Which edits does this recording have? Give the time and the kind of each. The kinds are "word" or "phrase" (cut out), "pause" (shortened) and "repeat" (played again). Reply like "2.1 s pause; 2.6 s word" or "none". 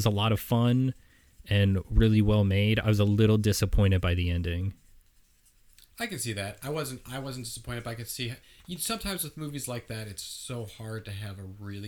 none